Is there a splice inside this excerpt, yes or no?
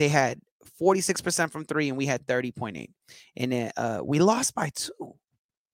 no